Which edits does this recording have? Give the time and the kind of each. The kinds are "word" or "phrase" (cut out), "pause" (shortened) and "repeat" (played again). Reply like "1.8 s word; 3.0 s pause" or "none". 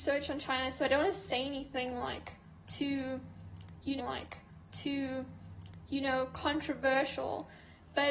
4.0 s repeat